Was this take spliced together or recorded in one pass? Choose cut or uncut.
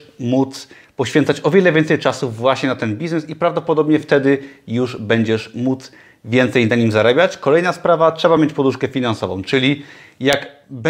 uncut